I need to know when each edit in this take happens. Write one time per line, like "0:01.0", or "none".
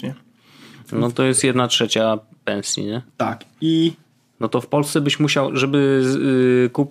none